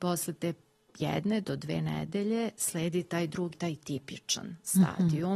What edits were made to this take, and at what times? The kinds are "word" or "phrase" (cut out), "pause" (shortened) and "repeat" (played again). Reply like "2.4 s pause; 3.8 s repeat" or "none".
3.5 s phrase